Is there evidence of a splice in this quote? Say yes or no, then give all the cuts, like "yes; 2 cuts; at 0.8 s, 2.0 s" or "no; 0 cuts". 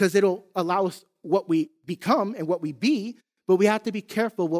no; 0 cuts